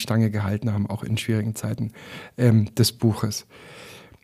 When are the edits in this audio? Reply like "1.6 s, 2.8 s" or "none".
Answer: none